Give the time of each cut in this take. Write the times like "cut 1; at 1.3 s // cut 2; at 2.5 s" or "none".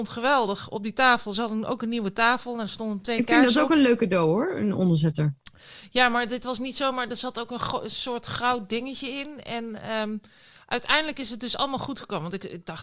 none